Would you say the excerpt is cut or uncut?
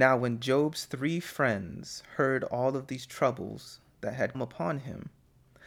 cut